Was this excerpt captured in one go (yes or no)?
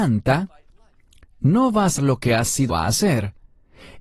no